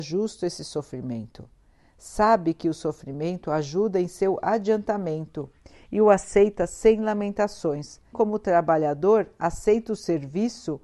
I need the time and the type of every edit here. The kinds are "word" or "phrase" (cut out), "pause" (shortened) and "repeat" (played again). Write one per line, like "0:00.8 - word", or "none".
0:08.1 - word